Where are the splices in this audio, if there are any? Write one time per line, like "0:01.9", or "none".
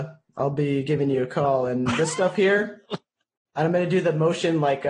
none